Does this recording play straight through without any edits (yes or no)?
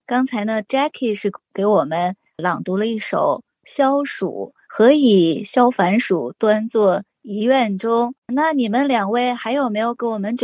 no